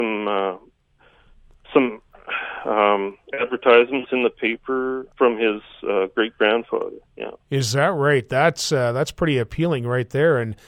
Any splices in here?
yes; 2 cuts; at 5.1 s, 7.4 s

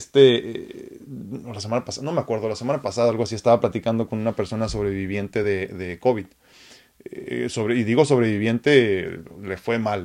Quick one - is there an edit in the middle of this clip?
no; 0 cuts

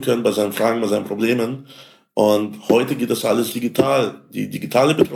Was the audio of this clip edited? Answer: no; 0 cuts

